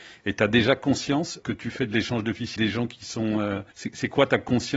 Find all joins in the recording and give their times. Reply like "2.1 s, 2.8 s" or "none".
1.4 s, 2.6 s, 3.7 s